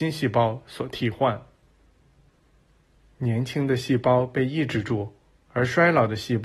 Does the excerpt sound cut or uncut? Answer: uncut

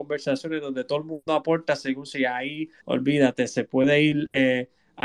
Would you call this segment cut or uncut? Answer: cut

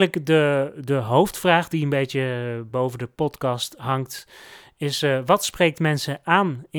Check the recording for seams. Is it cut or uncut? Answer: uncut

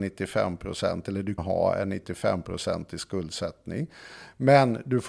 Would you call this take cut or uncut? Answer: cut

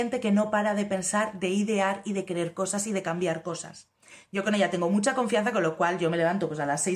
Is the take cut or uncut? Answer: uncut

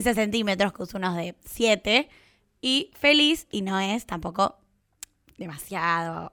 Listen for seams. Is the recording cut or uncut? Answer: uncut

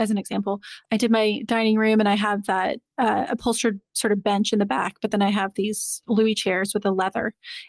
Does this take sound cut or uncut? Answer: uncut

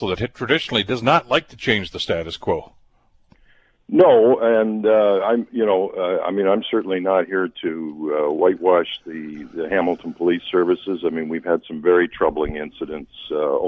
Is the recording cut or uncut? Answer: uncut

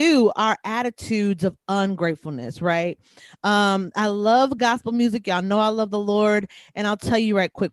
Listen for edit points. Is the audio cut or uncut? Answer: uncut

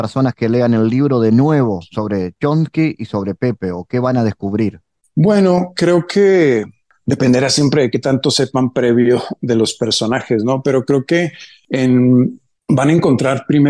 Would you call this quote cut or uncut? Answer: uncut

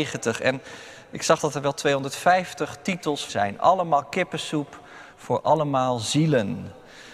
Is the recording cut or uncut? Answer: cut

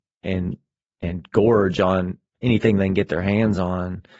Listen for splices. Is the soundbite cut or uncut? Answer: uncut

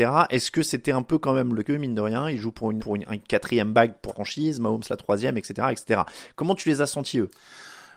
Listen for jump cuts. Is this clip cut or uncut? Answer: cut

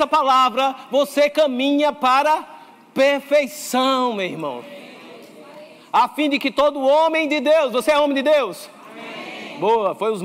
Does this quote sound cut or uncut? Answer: uncut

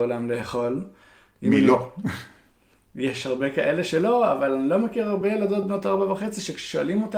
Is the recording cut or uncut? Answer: uncut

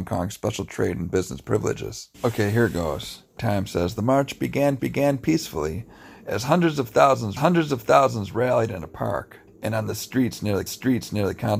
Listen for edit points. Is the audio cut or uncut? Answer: cut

